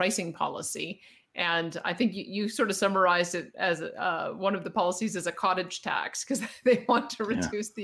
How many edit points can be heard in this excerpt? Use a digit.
0